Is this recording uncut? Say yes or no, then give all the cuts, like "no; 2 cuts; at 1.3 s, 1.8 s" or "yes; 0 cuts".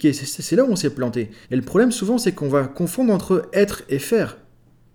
no; 1 cut; at 1.4 s